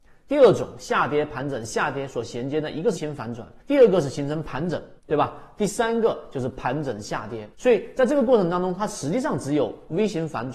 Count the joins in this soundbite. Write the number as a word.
four